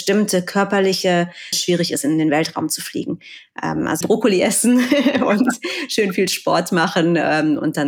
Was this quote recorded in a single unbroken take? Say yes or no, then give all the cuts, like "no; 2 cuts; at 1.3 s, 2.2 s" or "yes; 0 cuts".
no; 2 cuts; at 1.5 s, 4.0 s